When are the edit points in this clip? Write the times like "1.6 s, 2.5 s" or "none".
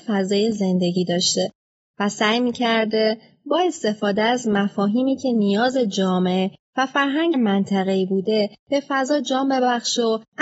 7.3 s